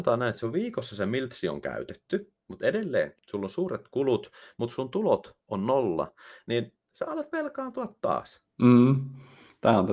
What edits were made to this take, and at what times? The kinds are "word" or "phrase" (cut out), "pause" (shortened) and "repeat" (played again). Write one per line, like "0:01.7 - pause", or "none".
0:02.4 - pause
0:05.4 - pause
0:08.5 - pause

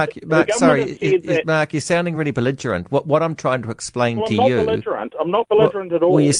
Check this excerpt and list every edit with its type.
none

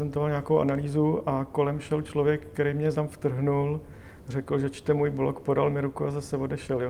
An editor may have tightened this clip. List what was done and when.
0:02.9 - phrase

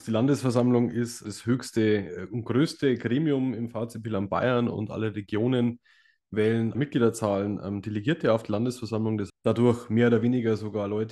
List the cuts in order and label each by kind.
0:01.2 - word
0:06.7 - phrase
0:09.3 - phrase

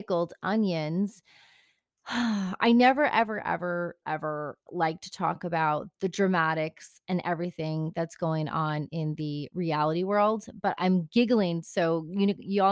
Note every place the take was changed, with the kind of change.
0:04.0 - word
0:04.7 - word
0:10.8 - word

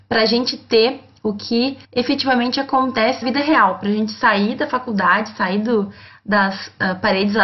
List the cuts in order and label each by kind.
0:01.8 - pause
0:03.2 - word

